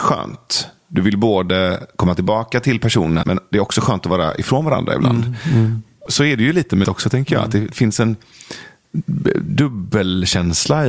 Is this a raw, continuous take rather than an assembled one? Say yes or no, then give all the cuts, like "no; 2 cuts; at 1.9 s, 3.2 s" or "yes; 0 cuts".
no; 3 cuts; at 3.2 s, 6.1 s, 6.8 s